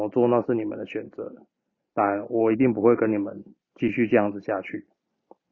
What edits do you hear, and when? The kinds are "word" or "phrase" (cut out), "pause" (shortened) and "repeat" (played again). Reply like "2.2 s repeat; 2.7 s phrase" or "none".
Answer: none

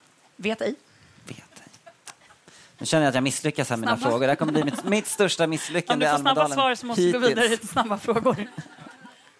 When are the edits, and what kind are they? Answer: none

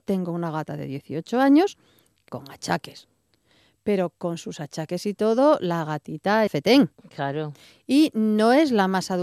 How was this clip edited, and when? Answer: 2.3 s word; 6.5 s word

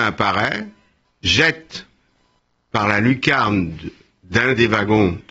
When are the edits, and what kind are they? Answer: 1.0 s word

